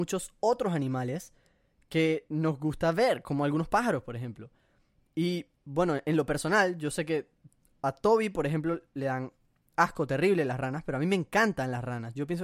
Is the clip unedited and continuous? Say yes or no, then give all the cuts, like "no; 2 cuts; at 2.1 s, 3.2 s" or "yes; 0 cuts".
yes; 0 cuts